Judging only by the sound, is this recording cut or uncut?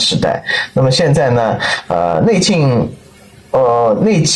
uncut